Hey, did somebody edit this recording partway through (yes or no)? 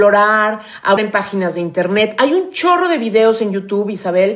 yes